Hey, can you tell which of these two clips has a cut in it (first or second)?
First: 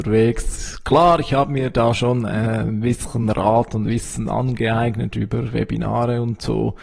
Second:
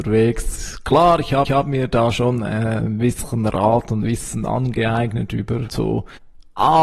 second